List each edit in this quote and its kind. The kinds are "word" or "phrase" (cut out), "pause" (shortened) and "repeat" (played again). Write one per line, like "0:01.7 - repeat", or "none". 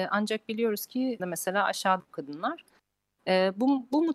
0:01.2 - phrase
0:02.0 - phrase